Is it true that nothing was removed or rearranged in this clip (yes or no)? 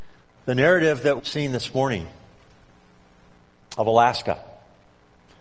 no